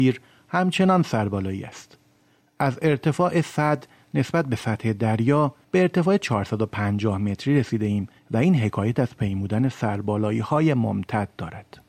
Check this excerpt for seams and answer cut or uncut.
uncut